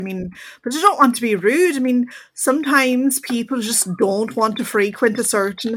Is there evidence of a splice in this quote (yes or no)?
no